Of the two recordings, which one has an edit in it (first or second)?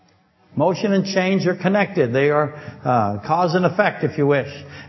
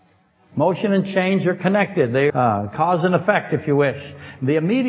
second